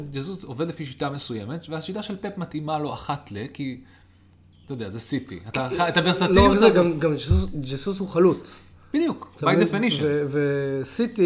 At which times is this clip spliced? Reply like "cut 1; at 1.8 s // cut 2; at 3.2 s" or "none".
none